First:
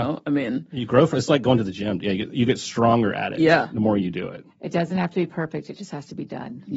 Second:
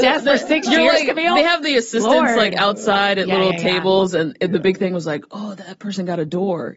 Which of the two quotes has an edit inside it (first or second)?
first